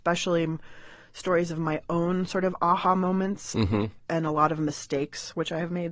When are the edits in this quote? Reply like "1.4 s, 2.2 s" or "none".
none